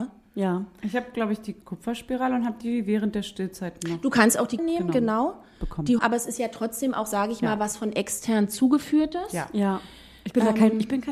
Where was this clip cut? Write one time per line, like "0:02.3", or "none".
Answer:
0:01.6
0:04.6
0:06.0